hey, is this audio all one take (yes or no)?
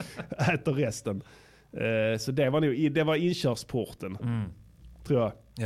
yes